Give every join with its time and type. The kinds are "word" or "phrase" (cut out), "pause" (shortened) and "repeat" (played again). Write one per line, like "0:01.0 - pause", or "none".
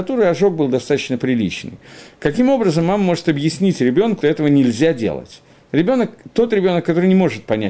0:04.2 - word